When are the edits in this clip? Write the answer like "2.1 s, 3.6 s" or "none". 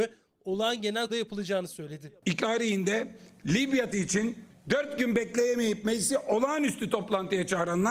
1.1 s, 2.4 s, 3.9 s